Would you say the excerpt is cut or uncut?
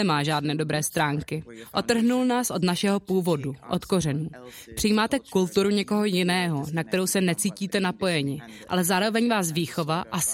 uncut